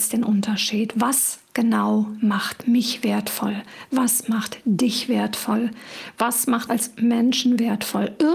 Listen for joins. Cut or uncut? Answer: cut